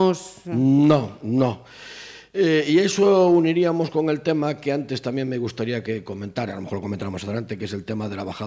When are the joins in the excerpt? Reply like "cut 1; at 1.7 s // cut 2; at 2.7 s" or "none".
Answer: none